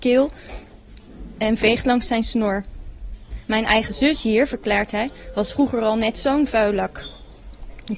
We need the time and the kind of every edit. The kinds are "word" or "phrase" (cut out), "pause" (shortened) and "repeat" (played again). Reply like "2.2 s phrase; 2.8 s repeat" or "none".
none